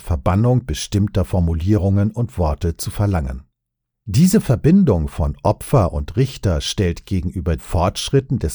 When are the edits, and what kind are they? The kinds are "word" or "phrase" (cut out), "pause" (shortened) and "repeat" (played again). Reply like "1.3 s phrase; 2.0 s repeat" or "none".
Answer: 7.6 s word